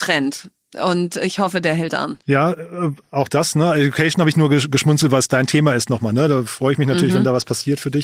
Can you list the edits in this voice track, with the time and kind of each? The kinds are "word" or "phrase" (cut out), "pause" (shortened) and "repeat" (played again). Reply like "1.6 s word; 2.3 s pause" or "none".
2.2 s pause